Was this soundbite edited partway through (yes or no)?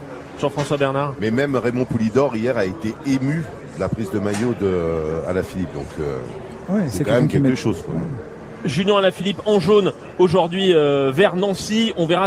no